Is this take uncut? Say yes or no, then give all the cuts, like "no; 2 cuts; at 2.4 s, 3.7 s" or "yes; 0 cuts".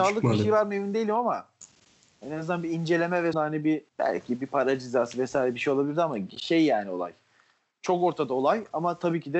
no; 2 cuts; at 3.3 s, 3.9 s